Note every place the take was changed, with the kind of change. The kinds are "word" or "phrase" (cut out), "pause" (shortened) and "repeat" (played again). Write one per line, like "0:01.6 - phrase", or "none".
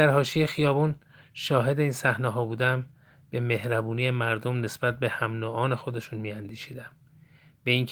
none